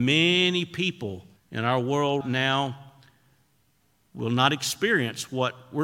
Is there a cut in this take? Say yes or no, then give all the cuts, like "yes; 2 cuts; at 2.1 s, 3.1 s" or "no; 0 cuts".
yes; 2 cuts; at 1.4 s, 2.2 s